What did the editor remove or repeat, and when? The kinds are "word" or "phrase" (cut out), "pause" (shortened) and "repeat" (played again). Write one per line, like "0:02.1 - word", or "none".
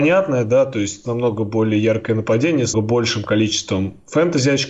0:01.0 - word
0:02.7 - word